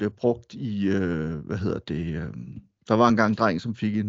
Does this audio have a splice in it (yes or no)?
no